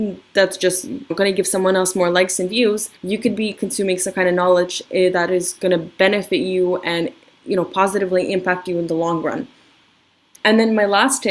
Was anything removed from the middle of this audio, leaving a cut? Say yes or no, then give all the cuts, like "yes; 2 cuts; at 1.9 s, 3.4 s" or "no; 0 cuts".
yes; 1 cut; at 3.0 s